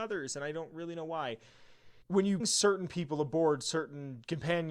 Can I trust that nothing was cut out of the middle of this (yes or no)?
no